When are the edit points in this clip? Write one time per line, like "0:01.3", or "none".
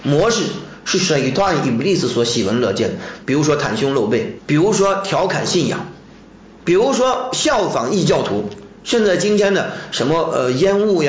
none